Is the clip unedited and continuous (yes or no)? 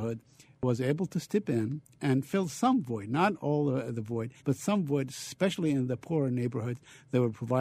no